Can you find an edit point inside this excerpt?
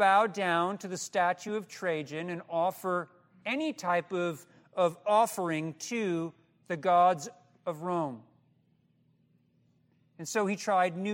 no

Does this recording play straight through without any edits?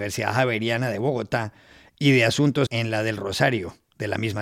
no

